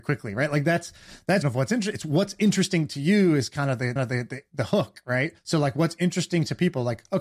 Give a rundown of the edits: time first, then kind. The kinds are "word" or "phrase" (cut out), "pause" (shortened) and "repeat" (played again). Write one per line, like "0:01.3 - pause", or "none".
0:01.4 - phrase
0:04.0 - repeat
0:05.4 - pause